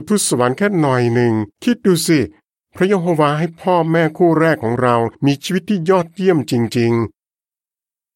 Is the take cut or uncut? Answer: cut